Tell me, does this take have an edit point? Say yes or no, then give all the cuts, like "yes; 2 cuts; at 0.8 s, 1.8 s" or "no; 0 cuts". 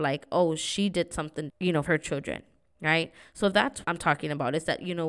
yes; 3 cuts; at 1.5 s, 1.9 s, 3.8 s